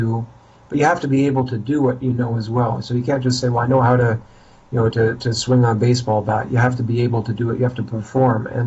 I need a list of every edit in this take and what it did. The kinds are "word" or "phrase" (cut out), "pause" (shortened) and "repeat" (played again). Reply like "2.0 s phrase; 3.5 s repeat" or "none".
none

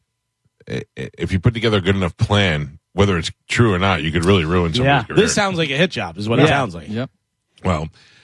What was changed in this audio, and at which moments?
2.8 s pause

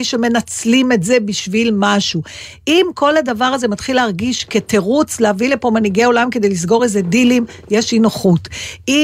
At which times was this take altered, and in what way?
none

